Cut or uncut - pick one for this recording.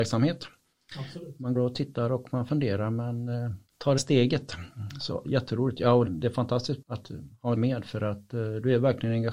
cut